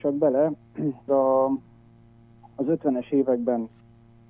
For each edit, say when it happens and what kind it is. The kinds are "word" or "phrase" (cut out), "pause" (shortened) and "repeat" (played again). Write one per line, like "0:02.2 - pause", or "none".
0:01.1 - word